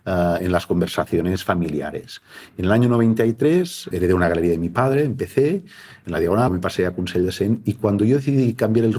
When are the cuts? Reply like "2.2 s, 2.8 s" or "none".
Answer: 3.9 s, 6.5 s